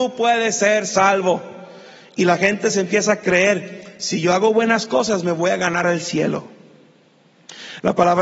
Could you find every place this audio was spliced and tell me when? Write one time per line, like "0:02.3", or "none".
none